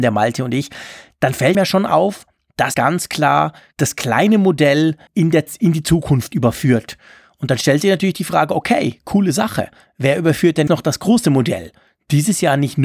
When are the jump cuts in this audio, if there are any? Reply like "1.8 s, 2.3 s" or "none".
1.5 s, 2.7 s, 3.7 s, 5.1 s, 10.7 s